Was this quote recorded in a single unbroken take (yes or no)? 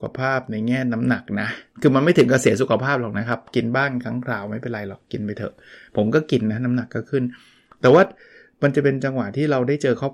yes